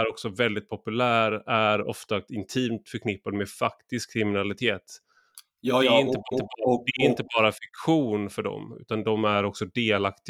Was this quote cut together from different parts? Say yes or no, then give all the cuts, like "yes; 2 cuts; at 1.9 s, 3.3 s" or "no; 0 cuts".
yes; 2 cuts; at 2.3 s, 6.3 s